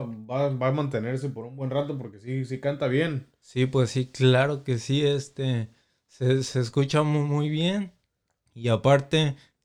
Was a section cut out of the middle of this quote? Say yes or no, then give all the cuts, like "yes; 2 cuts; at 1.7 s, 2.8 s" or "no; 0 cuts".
no; 0 cuts